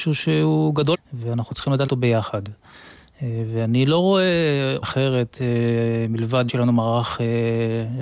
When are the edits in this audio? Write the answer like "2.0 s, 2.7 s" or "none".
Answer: 0.9 s, 1.9 s, 4.8 s, 6.5 s